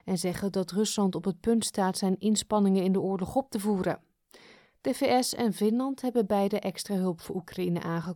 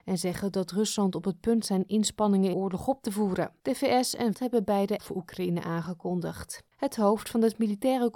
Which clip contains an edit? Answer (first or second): second